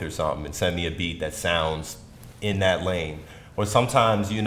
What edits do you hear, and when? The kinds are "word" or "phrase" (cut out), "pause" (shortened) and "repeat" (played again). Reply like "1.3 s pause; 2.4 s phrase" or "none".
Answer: none